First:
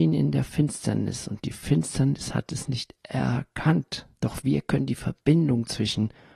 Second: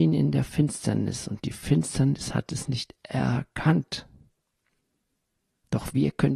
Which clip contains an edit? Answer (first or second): first